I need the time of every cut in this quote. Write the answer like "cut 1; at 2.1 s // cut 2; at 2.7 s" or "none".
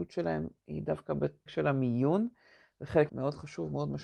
cut 1; at 1.5 s // cut 2; at 3.1 s

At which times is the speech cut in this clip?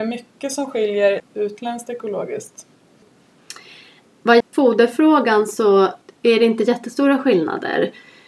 cut 1; at 1.2 s // cut 2; at 4.4 s

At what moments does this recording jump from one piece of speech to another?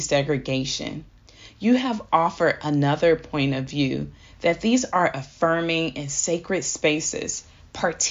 none

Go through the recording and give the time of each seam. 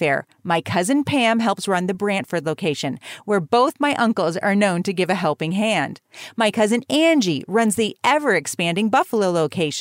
none

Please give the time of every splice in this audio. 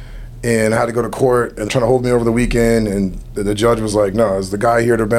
cut 1; at 1.7 s

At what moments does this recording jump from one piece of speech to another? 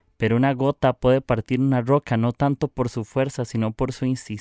none

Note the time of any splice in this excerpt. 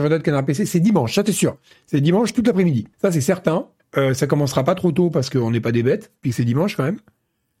cut 1; at 2.9 s // cut 2; at 3.8 s // cut 3; at 6.2 s

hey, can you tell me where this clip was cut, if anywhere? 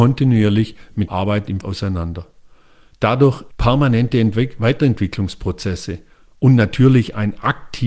cut 1; at 1.1 s // cut 2; at 1.6 s // cut 3; at 3.5 s

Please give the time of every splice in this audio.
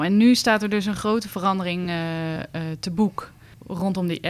none

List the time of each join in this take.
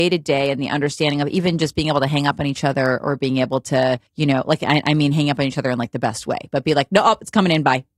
cut 1; at 4.1 s

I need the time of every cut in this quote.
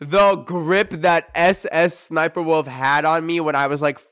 none

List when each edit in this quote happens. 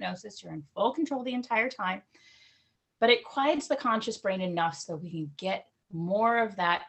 none

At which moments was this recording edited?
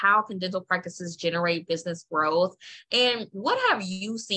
none

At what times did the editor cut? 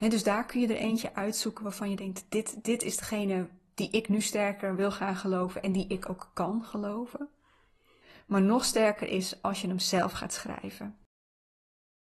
none

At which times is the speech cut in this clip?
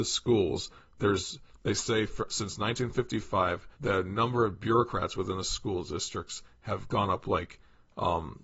cut 1; at 3.7 s

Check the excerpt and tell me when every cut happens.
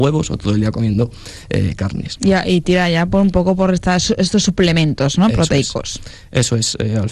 none

